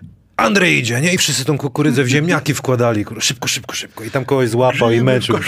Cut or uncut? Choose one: uncut